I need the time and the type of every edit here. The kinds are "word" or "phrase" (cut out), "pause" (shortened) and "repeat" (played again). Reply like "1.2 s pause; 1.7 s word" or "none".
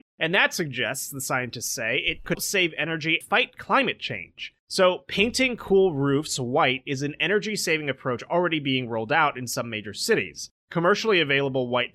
2.3 s word; 3.2 s word

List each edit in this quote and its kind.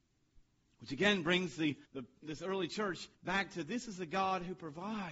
1.9 s pause; 3.1 s pause

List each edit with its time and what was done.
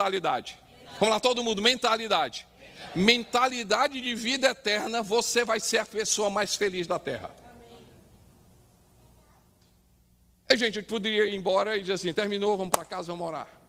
none

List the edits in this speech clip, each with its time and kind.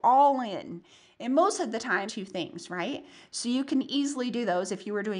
2.1 s phrase

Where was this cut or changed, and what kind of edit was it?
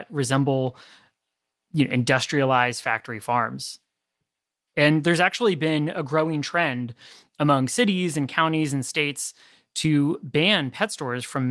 none

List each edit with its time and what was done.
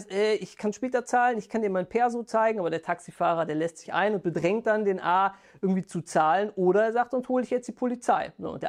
3.8 s phrase

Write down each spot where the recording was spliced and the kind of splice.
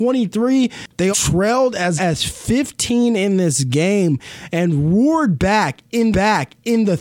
1.1 s word; 2.0 s word; 6.1 s repeat

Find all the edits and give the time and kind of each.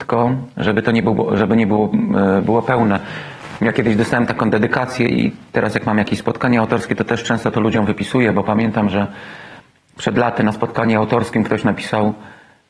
none

